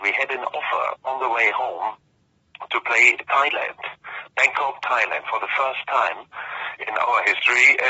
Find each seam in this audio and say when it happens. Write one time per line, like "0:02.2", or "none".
none

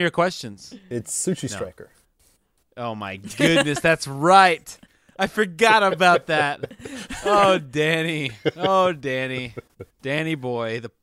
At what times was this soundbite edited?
none

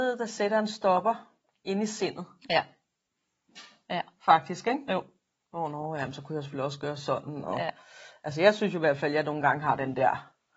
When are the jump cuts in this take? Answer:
none

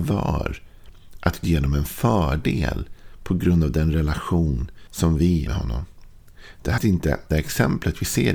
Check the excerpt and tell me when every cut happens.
0:01.4
0:04.9
0:05.5
0:06.8
0:07.3

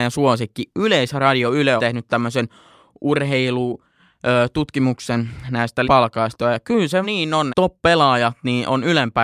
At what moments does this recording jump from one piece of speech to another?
0:01.8
0:05.8
0:07.0
0:07.5

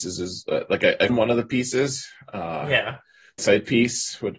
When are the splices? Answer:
0:01.1
0:03.4

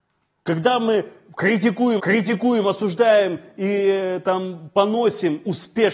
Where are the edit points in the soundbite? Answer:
0:02.0

